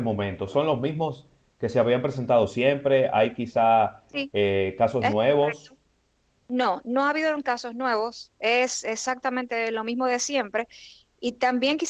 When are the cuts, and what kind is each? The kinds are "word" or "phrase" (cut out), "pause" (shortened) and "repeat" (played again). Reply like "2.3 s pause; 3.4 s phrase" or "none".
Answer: none